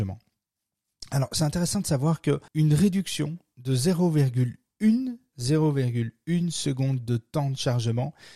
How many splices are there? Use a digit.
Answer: 2